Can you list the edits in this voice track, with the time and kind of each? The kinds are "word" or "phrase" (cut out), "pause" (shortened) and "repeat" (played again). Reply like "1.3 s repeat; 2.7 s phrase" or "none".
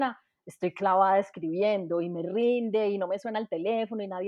none